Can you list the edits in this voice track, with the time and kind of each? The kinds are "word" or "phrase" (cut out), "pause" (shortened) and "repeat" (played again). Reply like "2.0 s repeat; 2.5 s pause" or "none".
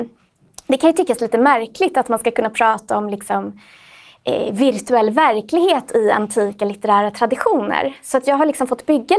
none